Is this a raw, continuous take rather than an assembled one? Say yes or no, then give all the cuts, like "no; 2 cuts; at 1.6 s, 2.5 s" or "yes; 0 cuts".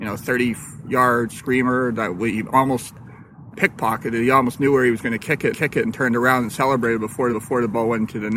no; 3 cuts; at 3.5 s, 5.5 s, 7.3 s